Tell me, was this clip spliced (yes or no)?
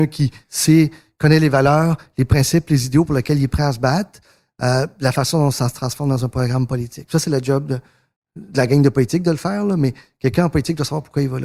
no